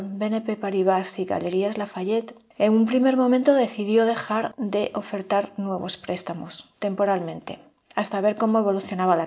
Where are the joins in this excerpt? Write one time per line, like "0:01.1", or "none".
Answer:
none